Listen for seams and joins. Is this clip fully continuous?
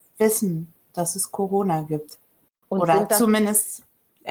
yes; 0 cuts

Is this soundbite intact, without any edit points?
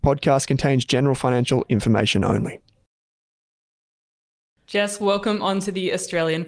yes; 0 cuts

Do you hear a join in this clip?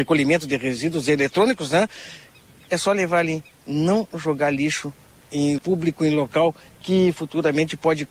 yes; 1 cut; at 5.6 s

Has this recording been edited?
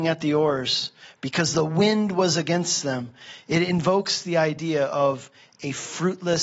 no; 0 cuts

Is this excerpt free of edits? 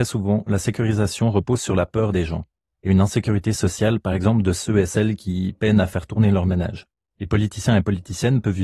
yes; 0 cuts

